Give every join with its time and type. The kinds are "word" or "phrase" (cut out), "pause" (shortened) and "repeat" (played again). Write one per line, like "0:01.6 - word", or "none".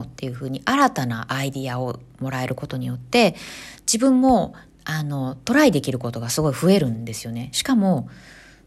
none

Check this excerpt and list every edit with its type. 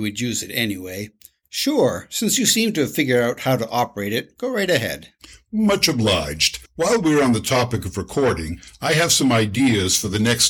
0:06.7 - pause

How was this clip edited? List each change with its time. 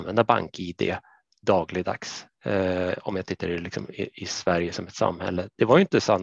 none

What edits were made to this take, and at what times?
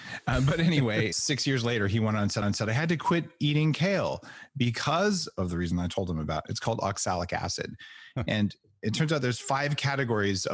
0:01.1 - word
0:02.4 - repeat

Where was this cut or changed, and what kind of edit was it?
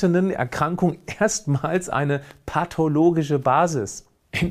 none

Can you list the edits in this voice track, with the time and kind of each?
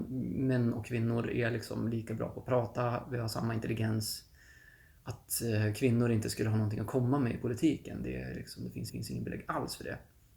0:08.9 - repeat

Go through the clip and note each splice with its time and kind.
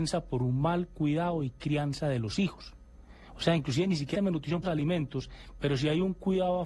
0:04.1 - word
0:04.6 - phrase

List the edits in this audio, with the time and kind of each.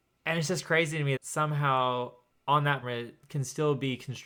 0:01.2 - word
0:02.3 - pause
0:02.8 - word

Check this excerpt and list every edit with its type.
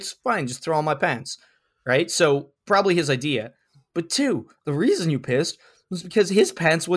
none

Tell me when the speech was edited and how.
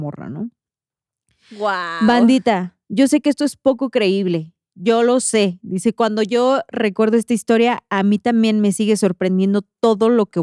0:02.8 - pause

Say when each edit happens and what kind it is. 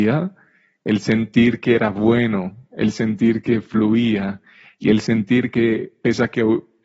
none

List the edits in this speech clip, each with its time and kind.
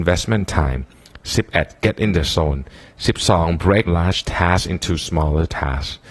0:03.9 - word

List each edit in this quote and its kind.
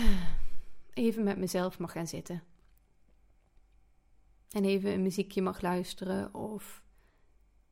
none

